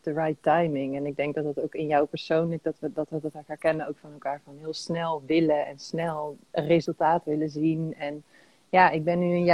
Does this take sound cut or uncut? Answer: uncut